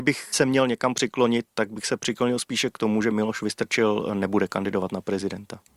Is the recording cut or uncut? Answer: uncut